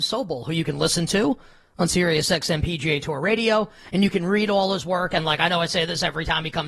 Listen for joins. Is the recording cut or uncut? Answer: uncut